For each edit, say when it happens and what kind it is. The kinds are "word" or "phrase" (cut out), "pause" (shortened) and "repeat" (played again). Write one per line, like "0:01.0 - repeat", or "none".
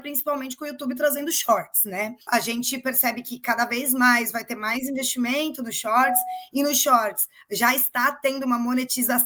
0:02.2 - pause